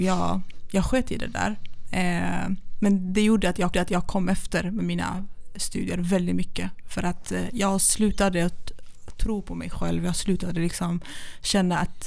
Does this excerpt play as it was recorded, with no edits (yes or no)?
no